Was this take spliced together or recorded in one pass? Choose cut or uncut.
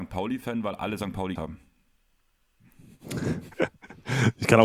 cut